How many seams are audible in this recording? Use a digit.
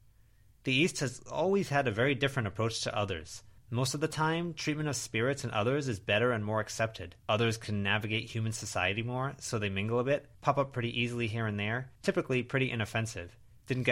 4